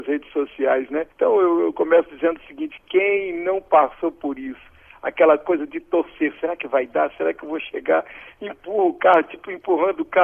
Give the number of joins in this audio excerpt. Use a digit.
1